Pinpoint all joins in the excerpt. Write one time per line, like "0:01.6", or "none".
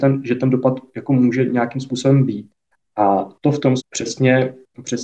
0:03.8